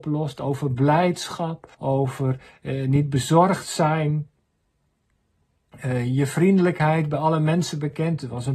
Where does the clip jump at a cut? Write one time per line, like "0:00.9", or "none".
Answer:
0:01.7